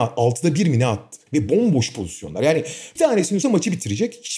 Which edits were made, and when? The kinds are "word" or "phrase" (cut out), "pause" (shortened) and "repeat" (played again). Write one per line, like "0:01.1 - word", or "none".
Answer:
0:01.3 - pause
0:03.0 - word
0:03.4 - word